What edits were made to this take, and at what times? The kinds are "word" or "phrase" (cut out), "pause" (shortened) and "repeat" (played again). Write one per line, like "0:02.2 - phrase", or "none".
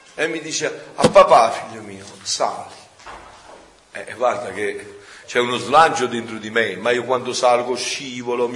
0:05.2 - word